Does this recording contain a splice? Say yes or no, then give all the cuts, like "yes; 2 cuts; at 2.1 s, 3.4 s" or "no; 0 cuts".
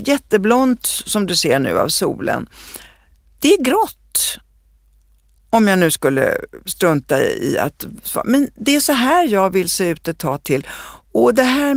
no; 0 cuts